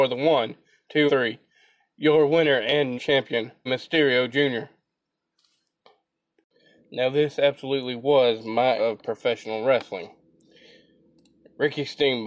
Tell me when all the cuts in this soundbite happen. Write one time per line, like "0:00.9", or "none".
0:01.1
0:03.0
0:03.7
0:08.8